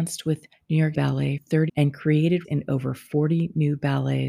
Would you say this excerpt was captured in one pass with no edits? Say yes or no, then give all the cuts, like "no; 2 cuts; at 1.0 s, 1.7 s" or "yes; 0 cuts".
no; 4 cuts; at 0.9 s, 1.4 s, 1.7 s, 2.4 s